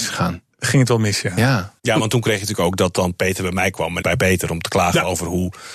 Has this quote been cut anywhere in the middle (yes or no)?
yes